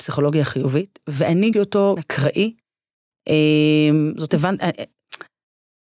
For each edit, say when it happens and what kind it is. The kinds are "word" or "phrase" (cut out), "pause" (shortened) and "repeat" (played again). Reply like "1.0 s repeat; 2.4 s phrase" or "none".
1.5 s word; 2.0 s word; 4.3 s word